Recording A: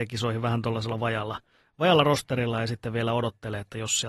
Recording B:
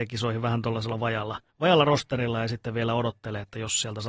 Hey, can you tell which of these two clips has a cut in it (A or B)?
B